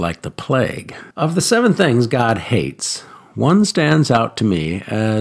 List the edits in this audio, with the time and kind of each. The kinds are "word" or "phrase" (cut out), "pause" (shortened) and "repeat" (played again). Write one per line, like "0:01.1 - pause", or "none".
0:01.1 - pause